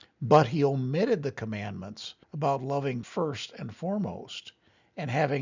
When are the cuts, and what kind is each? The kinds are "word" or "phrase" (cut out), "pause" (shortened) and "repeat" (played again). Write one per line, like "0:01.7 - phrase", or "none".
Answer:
0:02.2 - pause
0:03.0 - word